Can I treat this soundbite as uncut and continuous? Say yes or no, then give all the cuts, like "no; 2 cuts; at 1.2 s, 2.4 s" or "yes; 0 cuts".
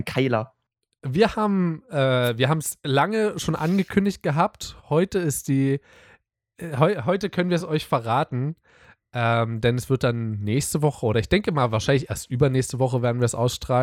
yes; 0 cuts